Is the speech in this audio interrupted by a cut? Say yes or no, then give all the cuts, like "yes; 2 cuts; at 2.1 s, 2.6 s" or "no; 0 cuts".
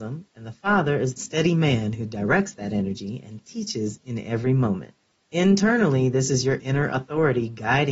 yes; 1 cut; at 1.2 s